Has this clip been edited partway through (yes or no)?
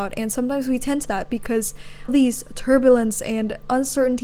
yes